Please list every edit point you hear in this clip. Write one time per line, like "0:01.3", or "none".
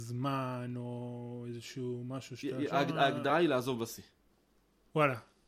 none